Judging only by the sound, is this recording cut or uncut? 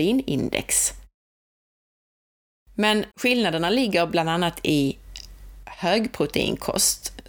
cut